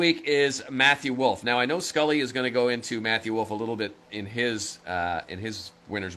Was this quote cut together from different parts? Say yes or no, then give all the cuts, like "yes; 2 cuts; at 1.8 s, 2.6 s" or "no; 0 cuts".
no; 0 cuts